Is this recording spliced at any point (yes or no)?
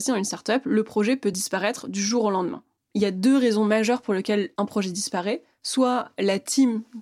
no